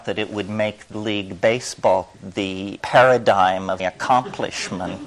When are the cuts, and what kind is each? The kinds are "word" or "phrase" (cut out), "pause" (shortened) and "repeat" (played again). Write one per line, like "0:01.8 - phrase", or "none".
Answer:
0:00.9 - word
0:02.1 - word
0:02.8 - word
0:03.8 - word

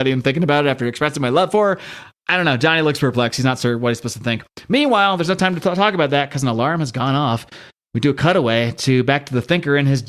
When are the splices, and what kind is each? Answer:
none

